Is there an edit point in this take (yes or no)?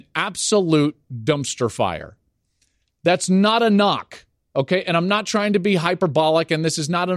no